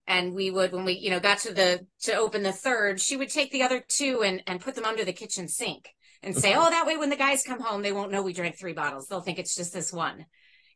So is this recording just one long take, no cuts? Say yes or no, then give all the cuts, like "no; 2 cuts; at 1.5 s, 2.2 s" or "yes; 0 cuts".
yes; 0 cuts